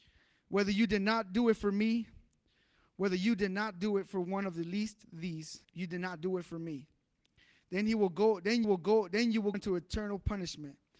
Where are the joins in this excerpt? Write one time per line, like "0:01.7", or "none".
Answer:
0:05.6
0:08.6
0:09.5